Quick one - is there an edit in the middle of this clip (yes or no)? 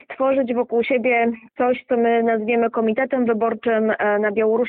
no